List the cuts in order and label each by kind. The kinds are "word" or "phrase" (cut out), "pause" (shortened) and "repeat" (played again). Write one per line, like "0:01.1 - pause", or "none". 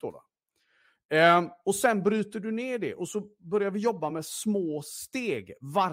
none